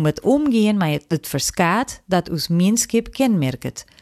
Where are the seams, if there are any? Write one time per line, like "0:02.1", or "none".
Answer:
none